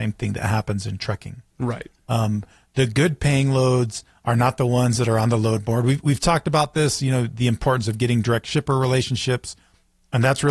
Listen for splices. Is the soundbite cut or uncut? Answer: uncut